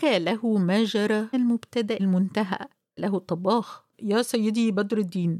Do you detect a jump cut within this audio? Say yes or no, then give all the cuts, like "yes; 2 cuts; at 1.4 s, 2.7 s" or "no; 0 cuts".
yes; 4 cuts; at 1.3 s, 2.0 s, 3.0 s, 3.9 s